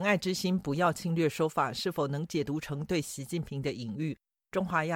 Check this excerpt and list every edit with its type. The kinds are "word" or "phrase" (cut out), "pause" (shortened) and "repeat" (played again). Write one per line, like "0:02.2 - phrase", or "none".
none

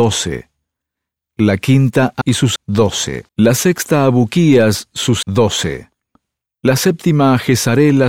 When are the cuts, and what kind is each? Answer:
0:02.2 - phrase
0:02.6 - word
0:03.3 - pause
0:05.2 - phrase

